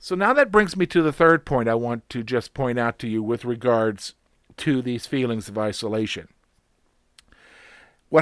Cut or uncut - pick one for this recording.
uncut